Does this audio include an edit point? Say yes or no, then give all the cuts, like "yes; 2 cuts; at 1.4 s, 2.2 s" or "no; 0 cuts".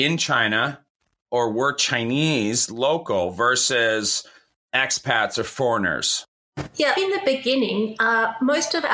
yes; 1 cut; at 6.9 s